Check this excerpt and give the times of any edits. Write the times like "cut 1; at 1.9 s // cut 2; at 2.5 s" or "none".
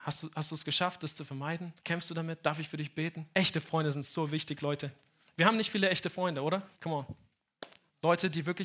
cut 1; at 1.8 s // cut 2; at 3.3 s // cut 3; at 6.7 s